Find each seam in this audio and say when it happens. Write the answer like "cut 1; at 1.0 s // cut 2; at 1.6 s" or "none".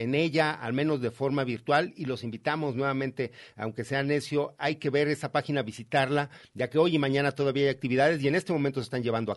none